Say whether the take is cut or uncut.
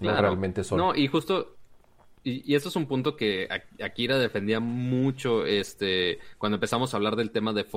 uncut